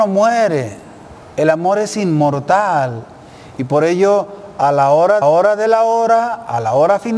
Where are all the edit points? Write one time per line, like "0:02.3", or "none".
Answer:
0:01.2
0:05.2